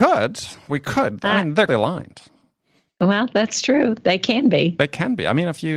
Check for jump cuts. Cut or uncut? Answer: cut